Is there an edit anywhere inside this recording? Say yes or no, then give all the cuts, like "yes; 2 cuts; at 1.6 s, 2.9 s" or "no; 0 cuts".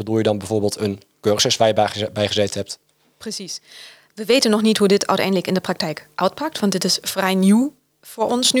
no; 0 cuts